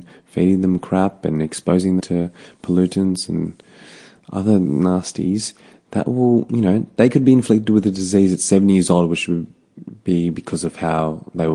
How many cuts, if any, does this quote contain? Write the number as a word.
one